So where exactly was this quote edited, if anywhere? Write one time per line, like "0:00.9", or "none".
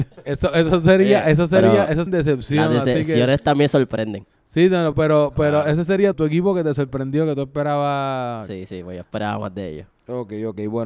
0:02.1
0:04.9
0:06.1